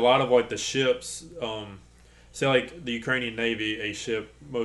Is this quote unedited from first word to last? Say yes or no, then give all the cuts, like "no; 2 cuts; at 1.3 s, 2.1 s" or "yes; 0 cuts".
yes; 0 cuts